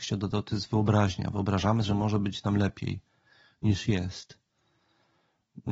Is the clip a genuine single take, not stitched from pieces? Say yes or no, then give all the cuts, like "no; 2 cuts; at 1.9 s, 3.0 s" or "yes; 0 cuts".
no; 1 cut; at 1.8 s